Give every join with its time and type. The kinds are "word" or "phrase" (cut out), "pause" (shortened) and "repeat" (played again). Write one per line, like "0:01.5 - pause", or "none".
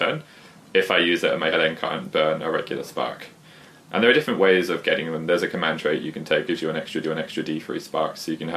0:01.5 - phrase
0:06.5 - word
0:07.0 - repeat